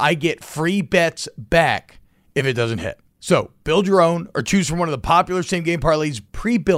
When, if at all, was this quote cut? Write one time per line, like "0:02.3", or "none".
none